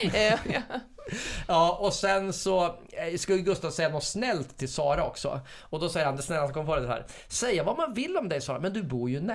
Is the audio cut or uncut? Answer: uncut